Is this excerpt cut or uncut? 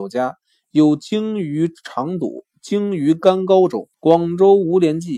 cut